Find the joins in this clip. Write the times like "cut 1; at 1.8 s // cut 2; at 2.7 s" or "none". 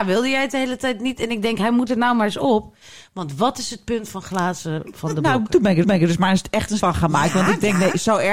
cut 1; at 5.8 s // cut 2; at 6.8 s